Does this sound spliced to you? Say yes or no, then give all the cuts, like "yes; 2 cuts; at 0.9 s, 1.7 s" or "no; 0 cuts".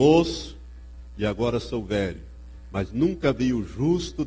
no; 0 cuts